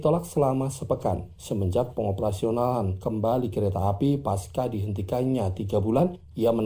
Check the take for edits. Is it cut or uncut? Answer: uncut